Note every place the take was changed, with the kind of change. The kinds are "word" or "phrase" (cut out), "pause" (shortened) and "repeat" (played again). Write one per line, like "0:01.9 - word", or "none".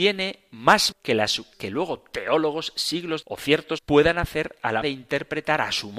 0:00.9 - word
0:01.5 - word
0:03.2 - word
0:03.8 - word
0:04.8 - word